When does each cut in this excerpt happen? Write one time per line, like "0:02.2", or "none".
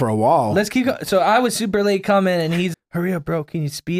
0:02.7